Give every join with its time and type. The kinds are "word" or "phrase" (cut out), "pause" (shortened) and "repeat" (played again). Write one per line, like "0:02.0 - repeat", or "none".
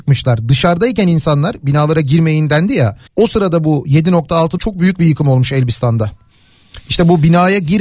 0:03.1 - pause
0:04.6 - phrase